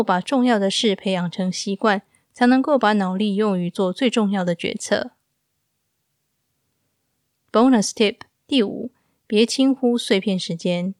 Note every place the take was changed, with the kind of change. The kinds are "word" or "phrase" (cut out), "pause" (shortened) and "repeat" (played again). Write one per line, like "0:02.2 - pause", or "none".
none